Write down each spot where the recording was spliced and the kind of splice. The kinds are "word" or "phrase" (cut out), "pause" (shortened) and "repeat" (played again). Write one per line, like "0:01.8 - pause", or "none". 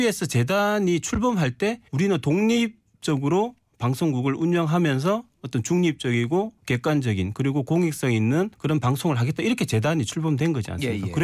0:01.9 - pause
0:06.6 - pause
0:08.5 - pause